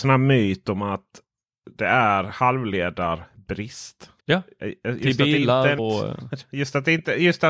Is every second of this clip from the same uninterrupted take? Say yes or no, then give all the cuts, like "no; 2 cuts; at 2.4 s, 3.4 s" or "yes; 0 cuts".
no; 2 cuts; at 4.2 s, 5.8 s